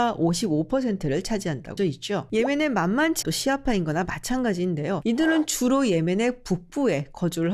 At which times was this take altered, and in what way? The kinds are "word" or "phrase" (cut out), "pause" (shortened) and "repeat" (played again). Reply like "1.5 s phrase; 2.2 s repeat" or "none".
1.8 s word; 3.2 s phrase